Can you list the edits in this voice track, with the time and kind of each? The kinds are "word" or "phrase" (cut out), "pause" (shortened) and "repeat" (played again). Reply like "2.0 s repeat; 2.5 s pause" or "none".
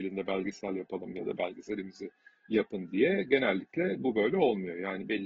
none